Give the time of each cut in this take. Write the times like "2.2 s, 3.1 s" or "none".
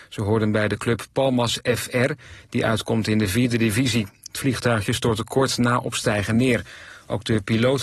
none